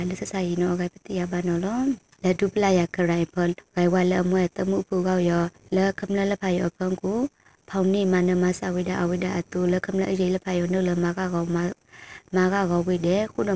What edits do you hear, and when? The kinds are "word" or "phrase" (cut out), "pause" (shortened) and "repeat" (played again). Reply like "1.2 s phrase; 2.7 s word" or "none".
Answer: none